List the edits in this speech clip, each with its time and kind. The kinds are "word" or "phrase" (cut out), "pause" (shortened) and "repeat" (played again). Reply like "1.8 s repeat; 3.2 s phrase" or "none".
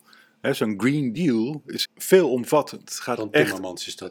1.9 s word